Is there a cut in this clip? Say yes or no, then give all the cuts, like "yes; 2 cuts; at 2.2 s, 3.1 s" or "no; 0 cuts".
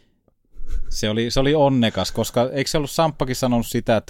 no; 0 cuts